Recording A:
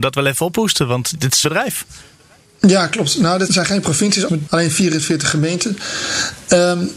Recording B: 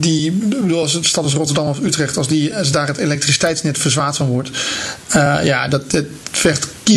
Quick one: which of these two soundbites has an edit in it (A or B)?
A